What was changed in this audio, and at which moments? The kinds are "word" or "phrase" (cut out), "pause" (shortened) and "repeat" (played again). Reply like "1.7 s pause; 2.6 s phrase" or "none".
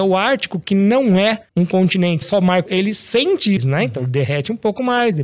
1.5 s pause; 2.2 s phrase; 2.7 s word; 3.6 s phrase